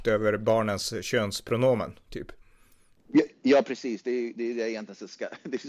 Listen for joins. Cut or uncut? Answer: uncut